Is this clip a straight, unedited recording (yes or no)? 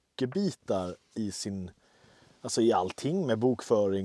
yes